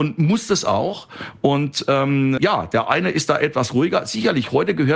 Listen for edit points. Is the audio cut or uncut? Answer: cut